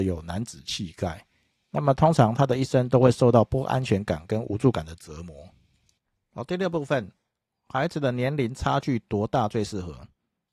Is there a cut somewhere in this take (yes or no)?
no